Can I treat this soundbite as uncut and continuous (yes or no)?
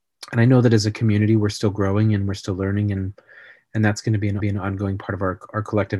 no